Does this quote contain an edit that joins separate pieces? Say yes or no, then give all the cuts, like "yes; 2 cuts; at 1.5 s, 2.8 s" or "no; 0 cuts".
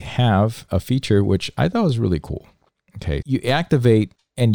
yes; 1 cut; at 3.2 s